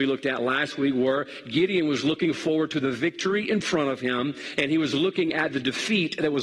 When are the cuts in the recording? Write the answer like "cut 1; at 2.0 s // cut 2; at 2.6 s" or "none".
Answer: none